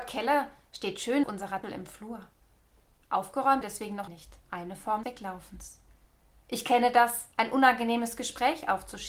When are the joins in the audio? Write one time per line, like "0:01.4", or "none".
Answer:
0:01.2
0:01.6
0:03.6
0:04.1
0:04.4
0:05.0
0:07.3